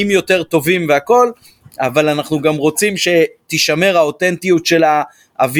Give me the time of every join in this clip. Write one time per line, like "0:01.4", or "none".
none